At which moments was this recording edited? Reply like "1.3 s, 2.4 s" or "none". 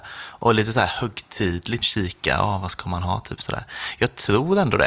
1.8 s